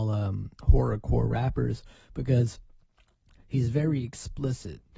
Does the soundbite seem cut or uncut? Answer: uncut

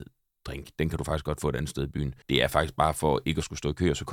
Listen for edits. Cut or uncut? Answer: cut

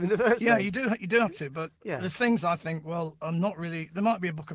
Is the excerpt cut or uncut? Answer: uncut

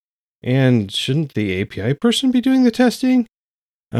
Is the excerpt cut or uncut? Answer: uncut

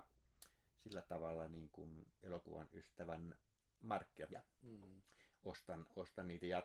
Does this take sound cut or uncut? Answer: cut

